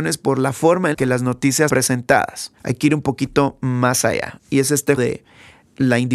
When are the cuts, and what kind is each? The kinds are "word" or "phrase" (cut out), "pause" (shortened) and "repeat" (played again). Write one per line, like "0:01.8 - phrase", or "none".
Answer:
0:00.9 - word
0:01.7 - word
0:02.6 - pause
0:05.0 - word